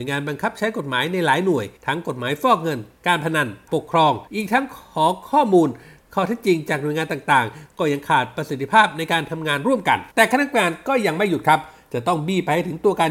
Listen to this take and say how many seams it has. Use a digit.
4